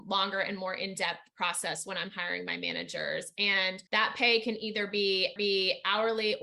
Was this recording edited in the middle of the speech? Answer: yes; 2 cuts; at 3.9 s, 5.4 s

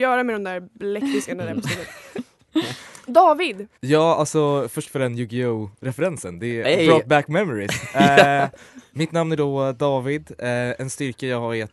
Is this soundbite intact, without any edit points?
no; 2 cuts; at 3.7 s, 4.8 s

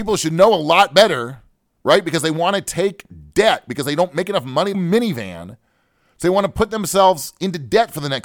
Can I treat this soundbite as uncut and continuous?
no; 1 cut; at 4.7 s

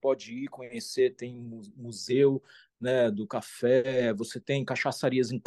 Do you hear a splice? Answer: no; 0 cuts

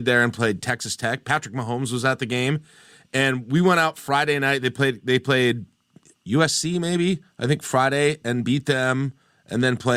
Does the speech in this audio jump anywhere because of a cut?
yes; 1 cut; at 7.3 s

